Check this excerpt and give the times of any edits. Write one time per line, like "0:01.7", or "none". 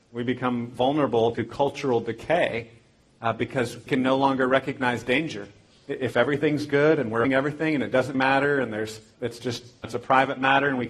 0:01.3
0:03.9
0:07.2
0:08.1
0:09.1
0:09.8

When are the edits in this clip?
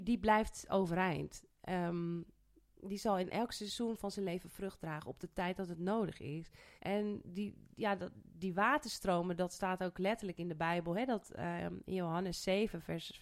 0:06.8

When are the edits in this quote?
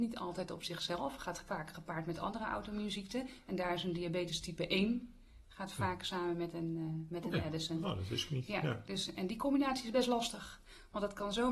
none

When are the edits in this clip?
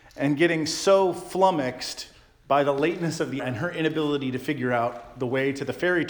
0:03.4

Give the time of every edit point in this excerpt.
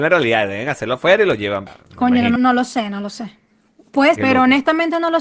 0:01.7
0:02.4
0:04.2

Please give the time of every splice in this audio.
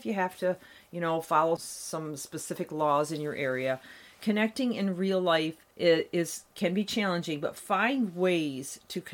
0:01.6
0:05.7

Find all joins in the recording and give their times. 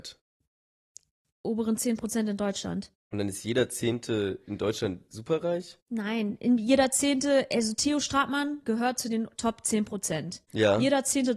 none

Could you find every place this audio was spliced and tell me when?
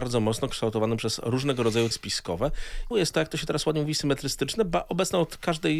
0:01.9
0:02.9

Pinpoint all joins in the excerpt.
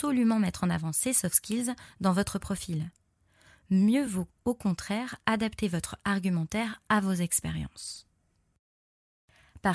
none

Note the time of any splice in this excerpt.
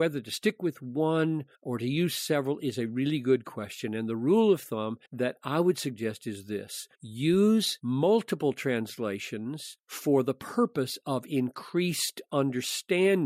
0:01.5
0:05.1
0:06.9

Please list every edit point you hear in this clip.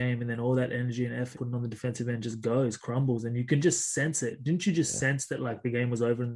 0:01.3

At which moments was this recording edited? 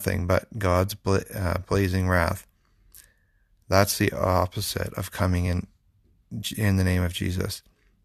none

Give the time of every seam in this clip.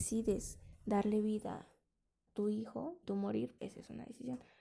0:02.3
0:03.0
0:03.6

